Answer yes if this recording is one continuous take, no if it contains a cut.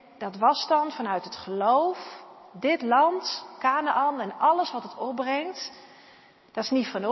yes